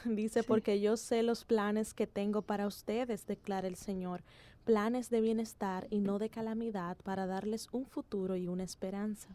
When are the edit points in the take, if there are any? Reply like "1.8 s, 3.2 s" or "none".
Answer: none